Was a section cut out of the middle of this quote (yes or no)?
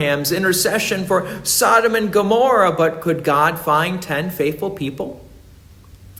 no